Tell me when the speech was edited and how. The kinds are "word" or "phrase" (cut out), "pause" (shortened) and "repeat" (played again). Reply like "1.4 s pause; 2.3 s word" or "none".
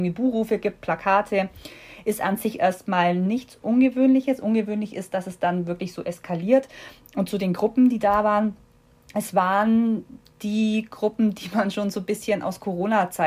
none